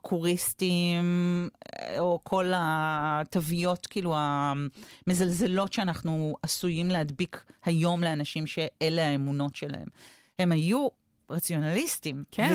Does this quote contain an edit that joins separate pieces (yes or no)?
no